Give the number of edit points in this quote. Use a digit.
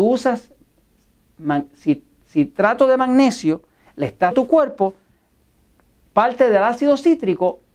1